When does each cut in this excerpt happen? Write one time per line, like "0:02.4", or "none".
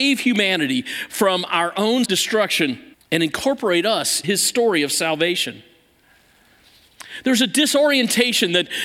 0:02.0
0:02.9
0:04.2

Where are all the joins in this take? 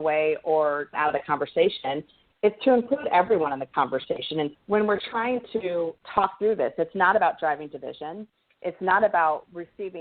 0:00.9
0:04.5

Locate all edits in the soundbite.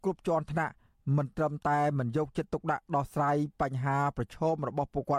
none

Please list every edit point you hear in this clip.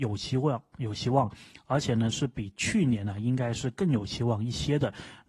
none

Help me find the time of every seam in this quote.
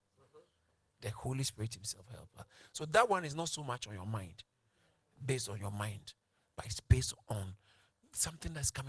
none

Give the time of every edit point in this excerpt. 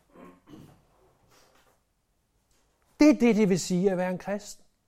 none

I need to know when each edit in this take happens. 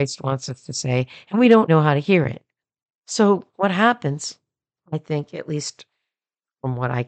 0:01.7
0:03.5

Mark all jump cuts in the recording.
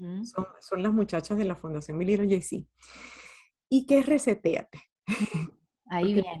none

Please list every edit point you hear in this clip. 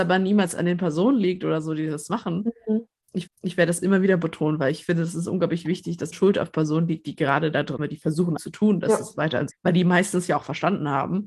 0:03.3
0:06.1
0:07.8
0:08.4
0:09.5

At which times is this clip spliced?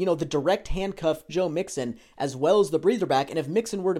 0:01.3

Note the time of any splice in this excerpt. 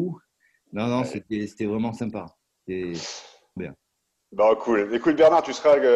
0:03.6

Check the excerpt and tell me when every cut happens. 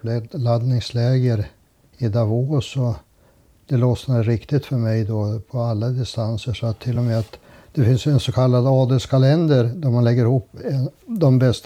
none

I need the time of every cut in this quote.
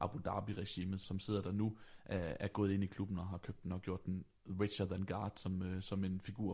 0:01.0

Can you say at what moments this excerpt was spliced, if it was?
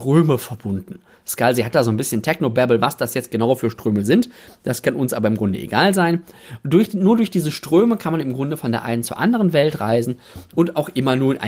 none

